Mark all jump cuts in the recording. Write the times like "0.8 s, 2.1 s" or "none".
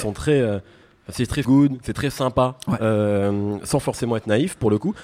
1.4 s